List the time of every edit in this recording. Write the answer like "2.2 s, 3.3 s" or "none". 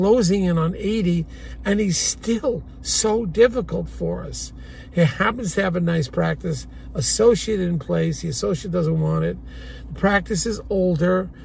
none